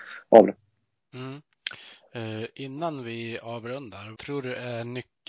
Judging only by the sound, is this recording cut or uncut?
cut